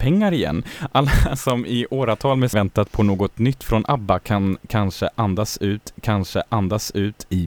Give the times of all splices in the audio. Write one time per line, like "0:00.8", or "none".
0:02.5
0:05.9